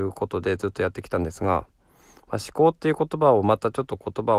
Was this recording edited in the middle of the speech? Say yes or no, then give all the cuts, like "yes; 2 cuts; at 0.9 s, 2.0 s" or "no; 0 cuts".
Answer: no; 0 cuts